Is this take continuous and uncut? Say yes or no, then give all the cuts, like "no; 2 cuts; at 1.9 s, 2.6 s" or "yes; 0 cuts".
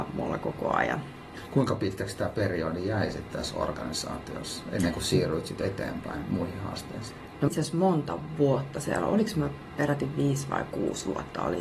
no; 1 cut; at 7.5 s